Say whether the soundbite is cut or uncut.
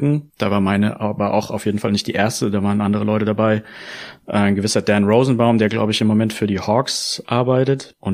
uncut